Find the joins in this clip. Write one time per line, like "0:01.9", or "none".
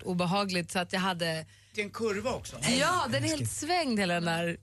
0:01.7